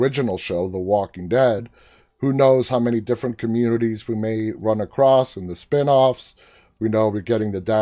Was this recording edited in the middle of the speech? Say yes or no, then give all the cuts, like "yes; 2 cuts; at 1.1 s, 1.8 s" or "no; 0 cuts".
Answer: no; 0 cuts